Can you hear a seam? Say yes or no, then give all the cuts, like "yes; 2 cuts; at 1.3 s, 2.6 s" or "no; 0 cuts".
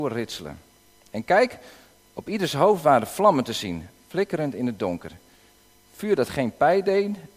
no; 0 cuts